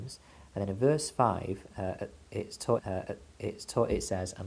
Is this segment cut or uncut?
cut